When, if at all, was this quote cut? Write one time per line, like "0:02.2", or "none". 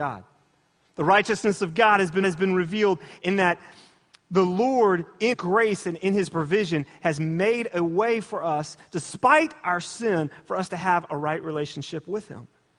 0:02.2
0:05.3